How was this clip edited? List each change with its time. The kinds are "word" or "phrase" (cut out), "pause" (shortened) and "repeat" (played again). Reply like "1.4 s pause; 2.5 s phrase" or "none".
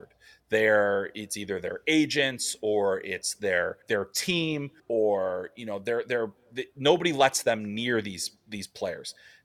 3.8 s pause; 4.8 s pause; 8.4 s pause